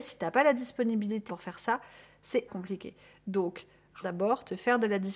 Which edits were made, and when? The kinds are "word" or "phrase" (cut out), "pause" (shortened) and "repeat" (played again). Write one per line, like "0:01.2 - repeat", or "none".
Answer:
0:01.3 - word
0:02.5 - word
0:04.0 - phrase